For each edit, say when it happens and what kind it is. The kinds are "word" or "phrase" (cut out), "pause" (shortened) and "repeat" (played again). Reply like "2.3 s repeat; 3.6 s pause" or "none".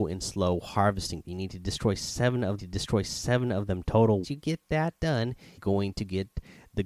1.2 s word; 2.6 s repeat; 4.2 s word; 5.6 s word